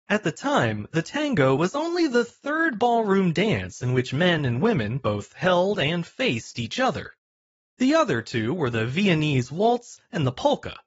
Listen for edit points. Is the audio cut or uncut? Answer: uncut